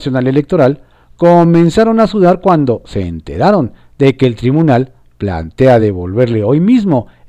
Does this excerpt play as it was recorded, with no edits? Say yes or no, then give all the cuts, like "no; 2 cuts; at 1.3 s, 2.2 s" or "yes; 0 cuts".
yes; 0 cuts